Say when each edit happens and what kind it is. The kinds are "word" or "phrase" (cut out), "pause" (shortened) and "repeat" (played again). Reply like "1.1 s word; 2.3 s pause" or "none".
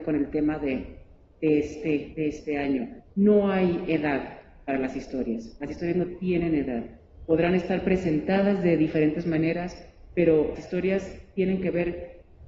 3.1 s pause; 10.6 s word